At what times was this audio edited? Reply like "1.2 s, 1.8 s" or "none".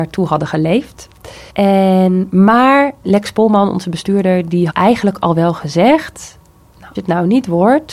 1.5 s, 3.0 s, 4.7 s, 6.9 s